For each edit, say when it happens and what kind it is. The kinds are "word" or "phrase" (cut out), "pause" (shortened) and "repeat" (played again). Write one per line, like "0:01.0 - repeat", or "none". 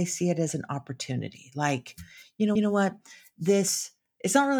0:02.6 - repeat